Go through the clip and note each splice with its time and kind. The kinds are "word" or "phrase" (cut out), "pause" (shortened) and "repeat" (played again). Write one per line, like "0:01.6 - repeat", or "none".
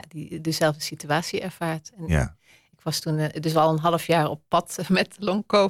none